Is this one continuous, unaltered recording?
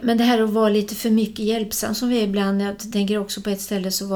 yes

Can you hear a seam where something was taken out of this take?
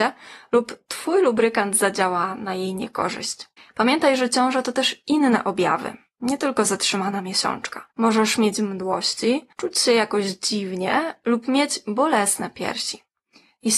yes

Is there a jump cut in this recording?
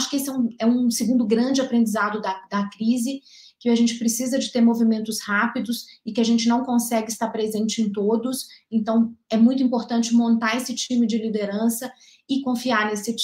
no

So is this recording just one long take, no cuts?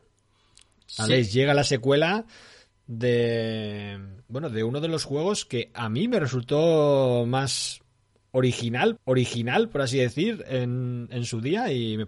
no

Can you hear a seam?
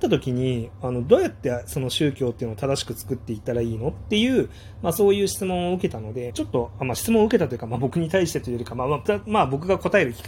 yes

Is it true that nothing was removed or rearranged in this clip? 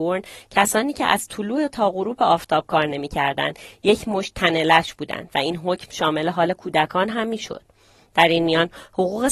yes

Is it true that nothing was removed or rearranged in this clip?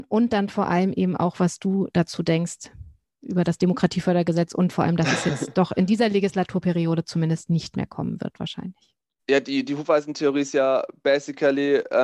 yes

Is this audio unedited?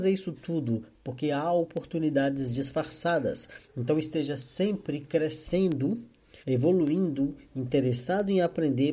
no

